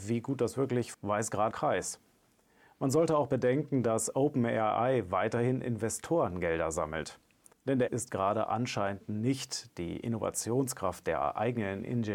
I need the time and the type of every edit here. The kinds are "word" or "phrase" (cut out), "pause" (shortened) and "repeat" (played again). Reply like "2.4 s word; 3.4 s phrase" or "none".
0.9 s word; 1.5 s phrase; 7.9 s word